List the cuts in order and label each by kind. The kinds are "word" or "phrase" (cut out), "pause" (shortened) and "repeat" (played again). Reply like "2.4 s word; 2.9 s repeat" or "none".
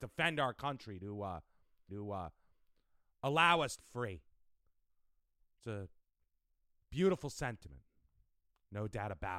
1.9 s repeat; 3.8 s word